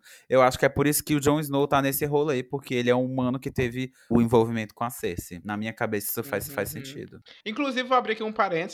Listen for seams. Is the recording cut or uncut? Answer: cut